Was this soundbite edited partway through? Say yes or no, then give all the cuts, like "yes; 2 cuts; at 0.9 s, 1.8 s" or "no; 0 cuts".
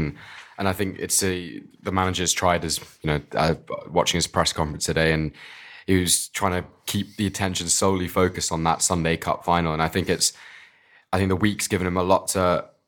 no; 0 cuts